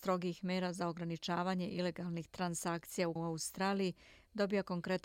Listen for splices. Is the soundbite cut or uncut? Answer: cut